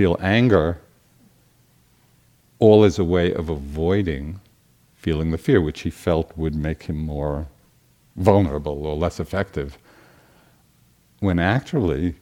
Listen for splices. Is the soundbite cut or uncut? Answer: uncut